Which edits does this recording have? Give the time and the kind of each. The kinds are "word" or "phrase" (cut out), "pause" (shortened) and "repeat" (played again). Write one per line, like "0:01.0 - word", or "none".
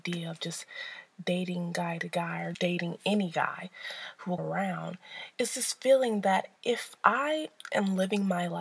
0:02.5 - word
0:04.4 - word
0:06.6 - pause

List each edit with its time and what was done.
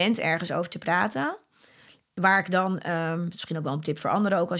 none

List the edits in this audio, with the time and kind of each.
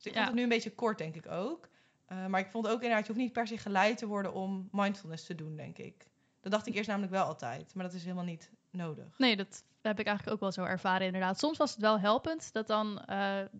none

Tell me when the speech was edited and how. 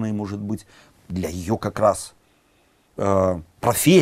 none

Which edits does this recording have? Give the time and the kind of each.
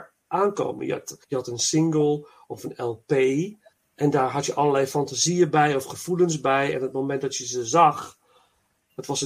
0:01.2 - pause
0:03.7 - pause

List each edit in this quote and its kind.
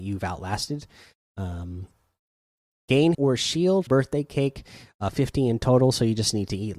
0:03.1 - word
0:03.9 - word

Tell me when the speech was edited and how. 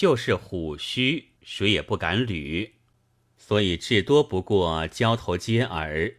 0:01.4 - pause

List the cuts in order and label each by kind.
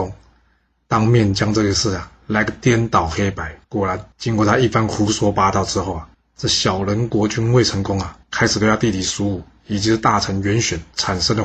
0:03.6 - pause
0:04.1 - pause
0:06.1 - pause
0:08.2 - pause

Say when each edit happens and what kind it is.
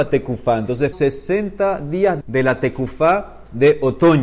0:00.9 - word
0:02.2 - word

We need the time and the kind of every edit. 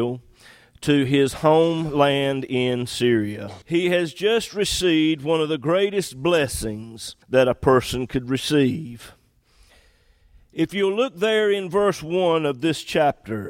0:03.6 - pause
0:07.2 - pause

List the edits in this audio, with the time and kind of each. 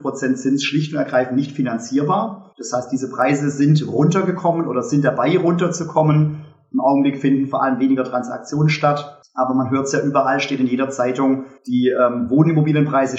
0:02.5 - pause
0:09.2 - pause
0:11.6 - pause

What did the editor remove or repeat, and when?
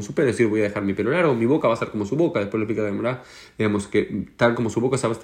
none

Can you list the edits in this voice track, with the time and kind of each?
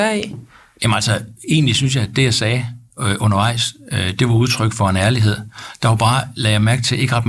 none

